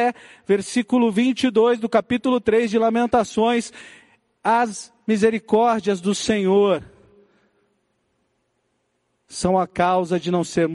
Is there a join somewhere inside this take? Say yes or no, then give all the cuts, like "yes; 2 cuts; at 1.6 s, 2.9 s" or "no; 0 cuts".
no; 0 cuts